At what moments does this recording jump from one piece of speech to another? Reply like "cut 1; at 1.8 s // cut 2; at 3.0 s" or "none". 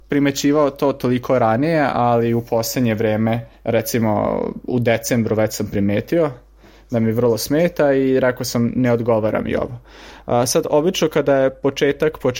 cut 1; at 3.5 s